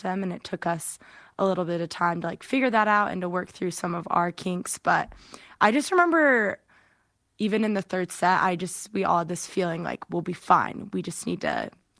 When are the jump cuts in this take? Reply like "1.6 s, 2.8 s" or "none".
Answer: none